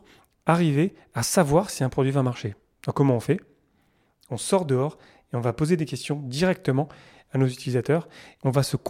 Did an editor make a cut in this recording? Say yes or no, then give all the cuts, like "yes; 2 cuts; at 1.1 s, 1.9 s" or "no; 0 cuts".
no; 0 cuts